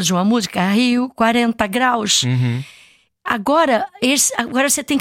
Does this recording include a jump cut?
no; 0 cuts

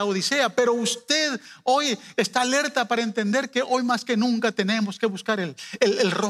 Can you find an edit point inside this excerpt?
no; 0 cuts

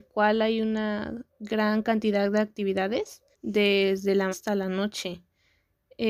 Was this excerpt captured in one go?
no; 3 cuts; at 1.3 s, 3.3 s, 4.3 s

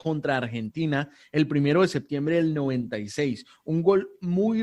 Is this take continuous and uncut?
yes; 0 cuts

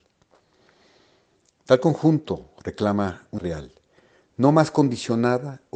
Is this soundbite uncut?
no; 1 cut; at 3.4 s

